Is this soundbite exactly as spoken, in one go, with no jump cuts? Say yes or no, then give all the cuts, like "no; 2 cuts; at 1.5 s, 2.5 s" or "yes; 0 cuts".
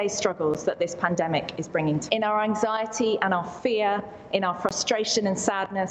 no; 1 cut; at 2.1 s